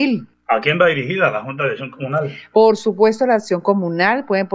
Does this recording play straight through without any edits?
yes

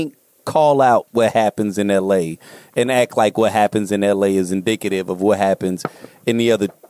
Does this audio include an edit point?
no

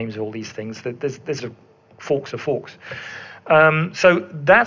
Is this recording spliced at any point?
yes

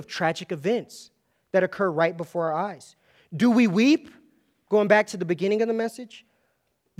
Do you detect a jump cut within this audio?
no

